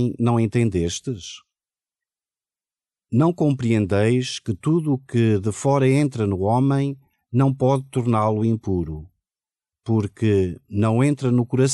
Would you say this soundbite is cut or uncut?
uncut